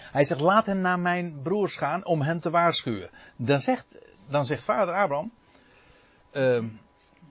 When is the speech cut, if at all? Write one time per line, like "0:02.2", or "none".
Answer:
none